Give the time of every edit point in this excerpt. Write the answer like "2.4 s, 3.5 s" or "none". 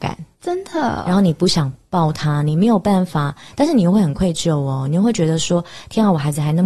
none